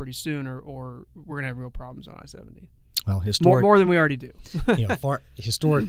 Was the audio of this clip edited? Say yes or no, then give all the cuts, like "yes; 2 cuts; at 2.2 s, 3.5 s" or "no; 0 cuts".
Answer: no; 0 cuts